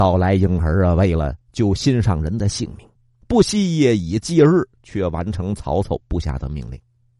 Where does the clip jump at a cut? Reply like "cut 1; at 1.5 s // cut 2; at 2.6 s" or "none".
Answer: cut 1; at 1.4 s // cut 2; at 3.0 s